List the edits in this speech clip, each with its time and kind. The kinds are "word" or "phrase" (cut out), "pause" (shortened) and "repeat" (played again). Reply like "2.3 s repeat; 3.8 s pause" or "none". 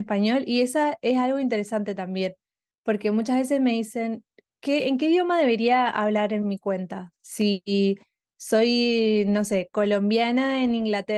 none